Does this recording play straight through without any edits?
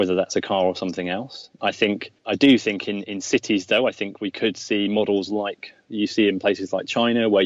no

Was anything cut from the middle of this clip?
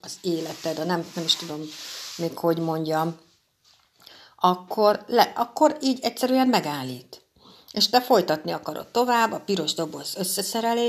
no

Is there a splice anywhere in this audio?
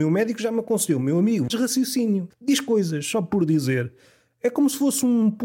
yes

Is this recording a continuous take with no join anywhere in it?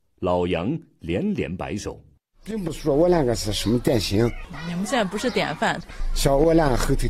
yes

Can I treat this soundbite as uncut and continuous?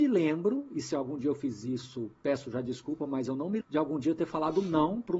no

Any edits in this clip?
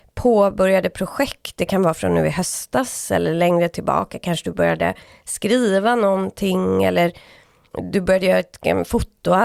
no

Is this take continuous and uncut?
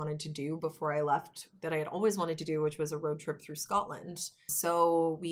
yes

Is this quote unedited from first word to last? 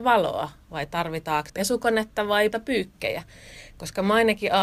no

